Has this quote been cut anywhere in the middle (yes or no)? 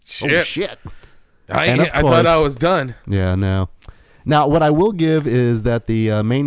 no